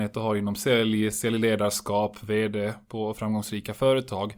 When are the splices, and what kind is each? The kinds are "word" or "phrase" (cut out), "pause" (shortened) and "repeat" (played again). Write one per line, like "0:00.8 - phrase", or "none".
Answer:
none